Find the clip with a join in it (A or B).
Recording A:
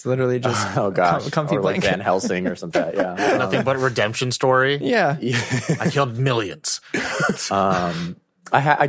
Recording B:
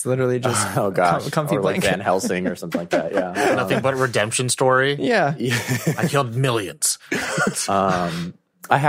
A